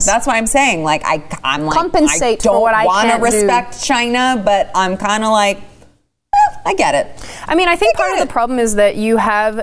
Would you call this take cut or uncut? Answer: uncut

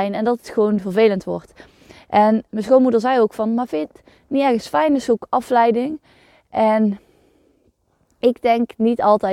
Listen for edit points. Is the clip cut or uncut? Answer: uncut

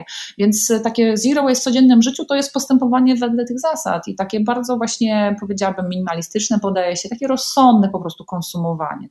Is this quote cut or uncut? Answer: uncut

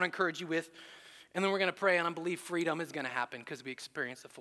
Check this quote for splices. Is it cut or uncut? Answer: uncut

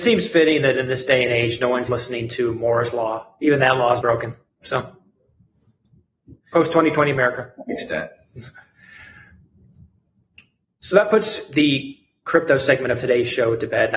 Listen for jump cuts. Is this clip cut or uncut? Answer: cut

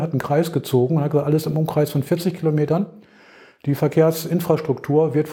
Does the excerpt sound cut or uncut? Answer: uncut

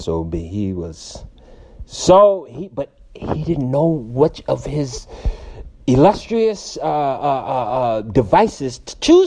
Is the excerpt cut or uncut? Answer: uncut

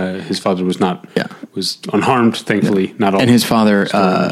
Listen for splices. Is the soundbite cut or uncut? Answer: cut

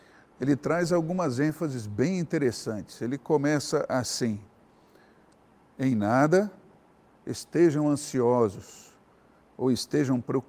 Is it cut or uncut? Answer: uncut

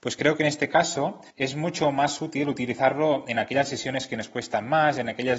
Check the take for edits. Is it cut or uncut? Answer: cut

